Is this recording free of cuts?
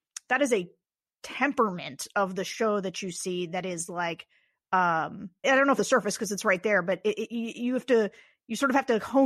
no; 2 cuts; at 5.4 s, 5.8 s

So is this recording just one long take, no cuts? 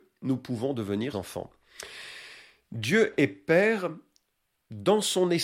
no; 1 cut; at 1.1 s

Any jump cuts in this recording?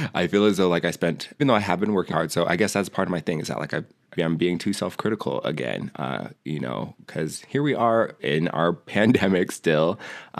yes; 4 cuts; at 1.4 s, 2.1 s, 4.2 s, 8.2 s

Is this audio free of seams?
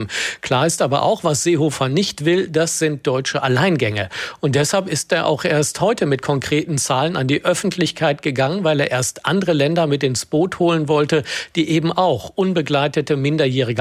yes; 0 cuts

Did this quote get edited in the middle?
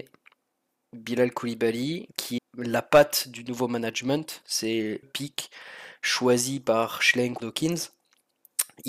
yes; 3 cuts; at 2.4 s, 5.0 s, 7.4 s

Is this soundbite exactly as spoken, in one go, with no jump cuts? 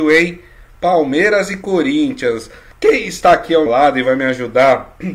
no; 2 cuts; at 2.7 s, 3.7 s

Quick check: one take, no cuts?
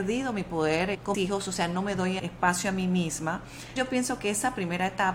no; 2 cuts; at 1.1 s, 2.2 s

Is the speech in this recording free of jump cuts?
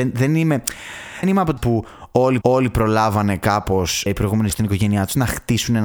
no; 5 cuts; at 1.2 s, 1.6 s, 2.4 s, 4.1 s, 4.5 s

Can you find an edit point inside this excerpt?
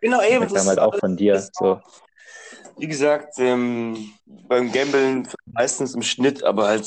yes; 2 cuts; at 4.2 s, 5.4 s

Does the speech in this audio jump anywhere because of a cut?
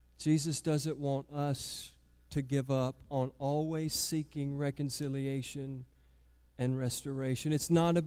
no; 0 cuts

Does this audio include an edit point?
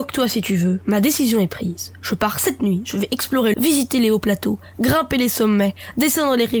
yes; 1 cut; at 3.5 s

